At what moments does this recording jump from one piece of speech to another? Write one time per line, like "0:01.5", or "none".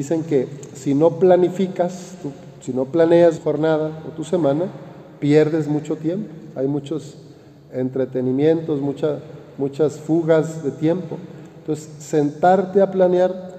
0:03.4